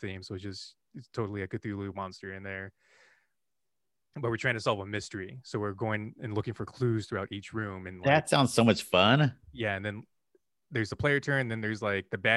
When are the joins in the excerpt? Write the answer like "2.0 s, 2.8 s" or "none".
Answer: none